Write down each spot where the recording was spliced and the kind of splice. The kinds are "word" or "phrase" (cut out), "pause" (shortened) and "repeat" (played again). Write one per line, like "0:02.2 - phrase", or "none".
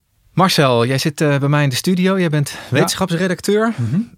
none